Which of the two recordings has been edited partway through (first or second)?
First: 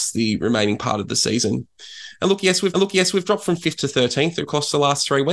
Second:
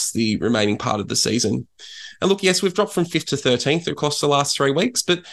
first